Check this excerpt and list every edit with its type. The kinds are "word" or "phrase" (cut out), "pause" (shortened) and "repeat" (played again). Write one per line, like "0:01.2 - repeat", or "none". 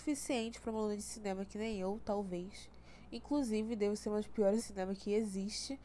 0:04.6 - word